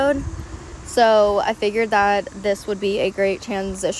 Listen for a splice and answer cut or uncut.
uncut